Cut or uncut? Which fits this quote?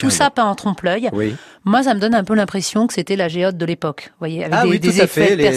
uncut